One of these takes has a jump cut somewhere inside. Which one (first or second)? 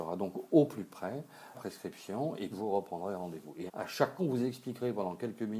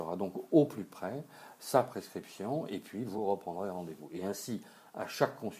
first